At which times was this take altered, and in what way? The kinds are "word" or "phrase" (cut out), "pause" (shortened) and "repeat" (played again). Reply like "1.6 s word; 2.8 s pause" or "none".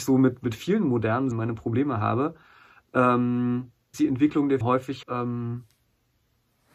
1.3 s word; 3.9 s word; 4.6 s word; 5.0 s word